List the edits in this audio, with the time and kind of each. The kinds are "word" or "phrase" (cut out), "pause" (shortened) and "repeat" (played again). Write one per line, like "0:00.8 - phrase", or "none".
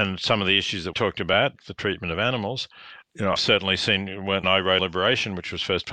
0:00.9 - word
0:01.6 - word
0:03.0 - word
0:03.4 - word
0:04.4 - word
0:04.8 - word